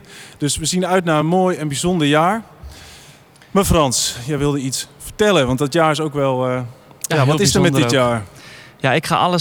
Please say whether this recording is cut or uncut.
uncut